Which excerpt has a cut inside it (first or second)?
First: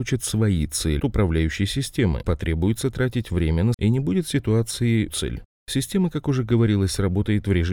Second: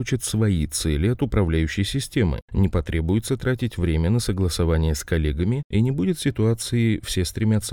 first